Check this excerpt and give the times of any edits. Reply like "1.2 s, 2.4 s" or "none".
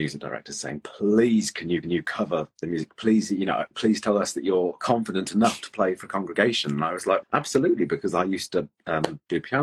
1.8 s, 7.2 s